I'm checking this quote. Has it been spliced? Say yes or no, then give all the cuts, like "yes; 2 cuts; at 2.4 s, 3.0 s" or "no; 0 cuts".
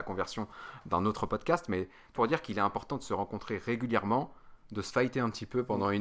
yes; 1 cut; at 2.2 s